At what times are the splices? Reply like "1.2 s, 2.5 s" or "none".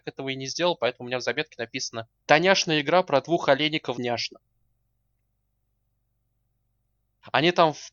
2.2 s, 3.9 s